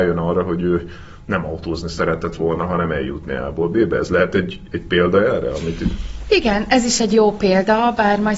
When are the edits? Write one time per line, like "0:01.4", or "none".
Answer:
none